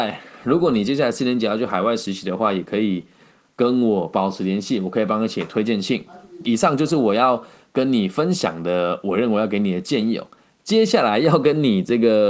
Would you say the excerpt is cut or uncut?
uncut